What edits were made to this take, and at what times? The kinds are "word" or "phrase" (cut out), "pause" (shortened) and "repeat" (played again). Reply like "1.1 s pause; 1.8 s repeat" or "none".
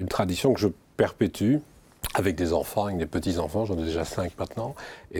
none